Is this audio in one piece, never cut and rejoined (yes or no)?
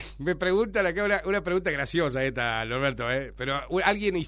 yes